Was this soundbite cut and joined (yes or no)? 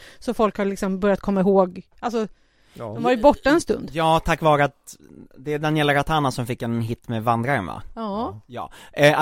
no